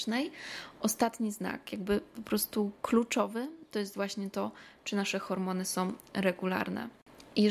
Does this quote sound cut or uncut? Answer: uncut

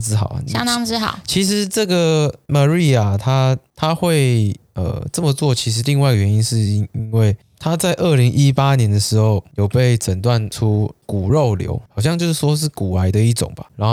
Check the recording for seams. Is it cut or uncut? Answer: cut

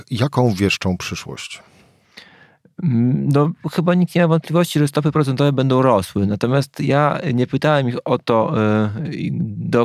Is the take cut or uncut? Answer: uncut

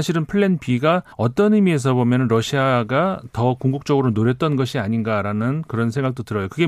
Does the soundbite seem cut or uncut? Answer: cut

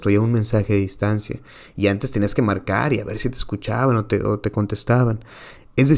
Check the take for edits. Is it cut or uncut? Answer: uncut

